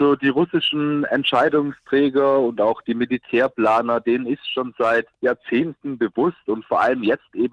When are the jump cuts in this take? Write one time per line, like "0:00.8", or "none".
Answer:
0:05.1